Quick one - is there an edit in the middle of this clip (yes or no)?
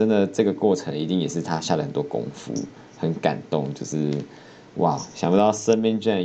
no